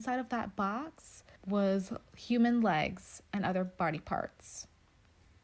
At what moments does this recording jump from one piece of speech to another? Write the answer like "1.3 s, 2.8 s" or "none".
1.4 s